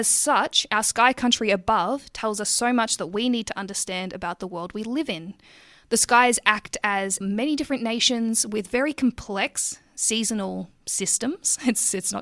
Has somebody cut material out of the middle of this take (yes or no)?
yes